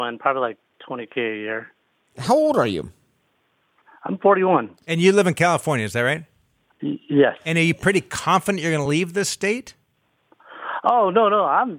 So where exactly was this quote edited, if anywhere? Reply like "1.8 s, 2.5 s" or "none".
none